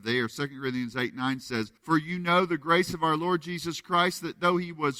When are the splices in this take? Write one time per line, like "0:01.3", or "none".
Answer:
0:01.8

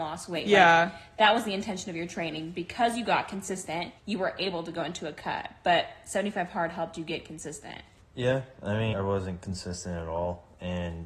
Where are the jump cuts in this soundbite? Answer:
0:04.0
0:08.0
0:08.9

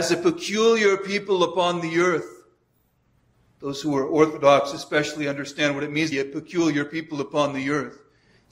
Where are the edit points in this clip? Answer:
0:06.1

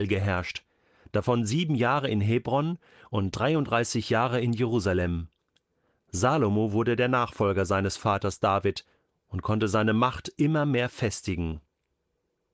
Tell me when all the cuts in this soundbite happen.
none

